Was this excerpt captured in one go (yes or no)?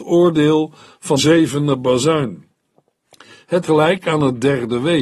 no